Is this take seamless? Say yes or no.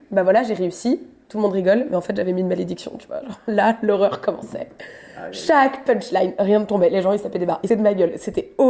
no